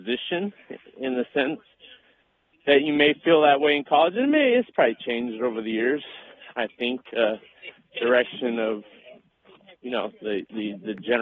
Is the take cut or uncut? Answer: uncut